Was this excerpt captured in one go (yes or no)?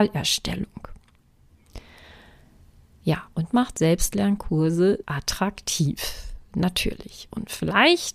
no